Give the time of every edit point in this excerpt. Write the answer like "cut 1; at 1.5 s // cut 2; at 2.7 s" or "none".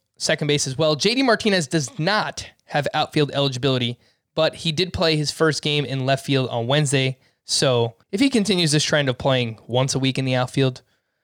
cut 1; at 8.0 s

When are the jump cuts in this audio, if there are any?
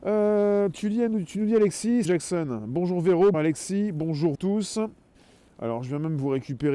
cut 1; at 2.0 s // cut 2; at 3.3 s // cut 3; at 4.3 s // cut 4; at 5.1 s

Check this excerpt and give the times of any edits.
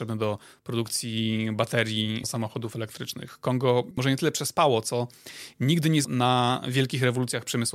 cut 1; at 2.2 s // cut 2; at 6.0 s

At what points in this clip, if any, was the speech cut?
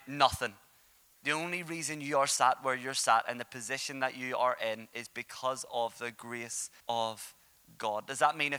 cut 1; at 6.8 s

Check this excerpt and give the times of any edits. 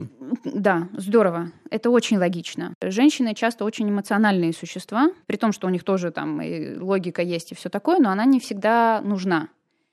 cut 1; at 5.2 s

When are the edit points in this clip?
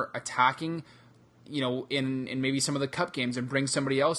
none

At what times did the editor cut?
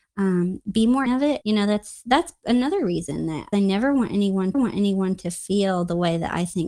cut 1; at 1.1 s // cut 2; at 1.4 s // cut 3; at 3.5 s // cut 4; at 4.5 s

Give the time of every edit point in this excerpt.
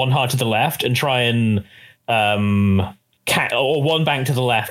cut 1; at 3.0 s

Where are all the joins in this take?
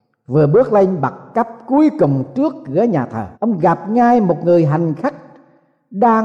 cut 1; at 3.3 s

